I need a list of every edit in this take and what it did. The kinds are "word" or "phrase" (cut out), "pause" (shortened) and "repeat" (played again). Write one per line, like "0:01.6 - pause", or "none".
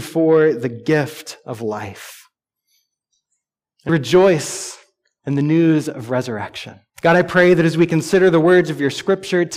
0:03.9 - word
0:06.9 - pause